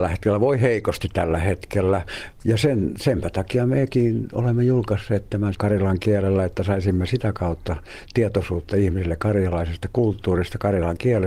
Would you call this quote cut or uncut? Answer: cut